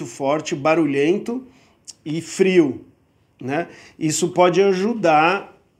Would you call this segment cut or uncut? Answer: uncut